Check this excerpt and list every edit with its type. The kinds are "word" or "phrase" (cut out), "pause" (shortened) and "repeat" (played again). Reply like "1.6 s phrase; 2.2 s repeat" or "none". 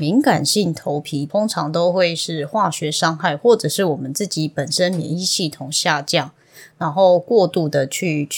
none